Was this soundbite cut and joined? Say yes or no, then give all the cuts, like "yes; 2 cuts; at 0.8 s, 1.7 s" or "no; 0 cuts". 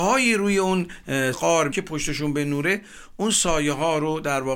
yes; 2 cuts; at 1.3 s, 1.7 s